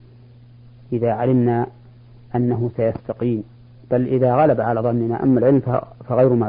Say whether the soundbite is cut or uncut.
uncut